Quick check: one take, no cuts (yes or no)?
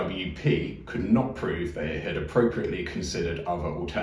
yes